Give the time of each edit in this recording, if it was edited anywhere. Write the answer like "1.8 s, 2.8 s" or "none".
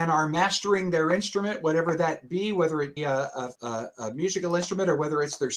3.0 s, 3.6 s